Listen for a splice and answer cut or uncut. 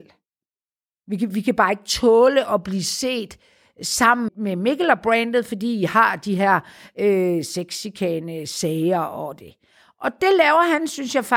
cut